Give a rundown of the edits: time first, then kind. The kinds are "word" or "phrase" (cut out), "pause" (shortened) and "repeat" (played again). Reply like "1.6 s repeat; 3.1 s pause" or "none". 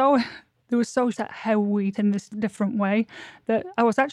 1.1 s word; 1.9 s word